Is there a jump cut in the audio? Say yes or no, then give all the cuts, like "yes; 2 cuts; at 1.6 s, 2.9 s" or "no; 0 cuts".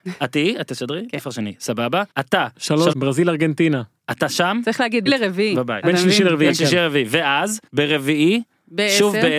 yes; 4 cuts; at 2.1 s, 2.9 s, 5.1 s, 7.7 s